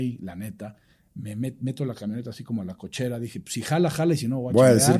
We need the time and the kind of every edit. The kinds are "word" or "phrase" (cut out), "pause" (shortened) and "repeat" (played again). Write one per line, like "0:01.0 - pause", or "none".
none

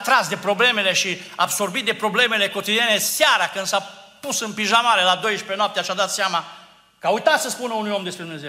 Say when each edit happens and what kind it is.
none

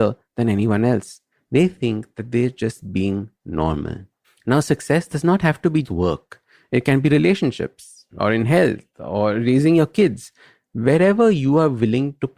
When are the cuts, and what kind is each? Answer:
0:05.8 - word

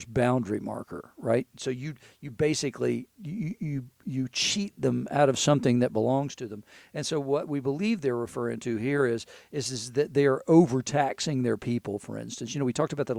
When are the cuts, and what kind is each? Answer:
none

